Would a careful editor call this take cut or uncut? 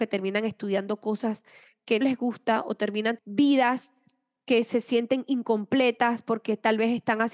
cut